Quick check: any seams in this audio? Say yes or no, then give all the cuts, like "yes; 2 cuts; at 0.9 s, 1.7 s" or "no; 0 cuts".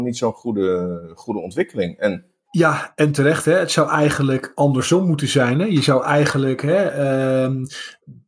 no; 0 cuts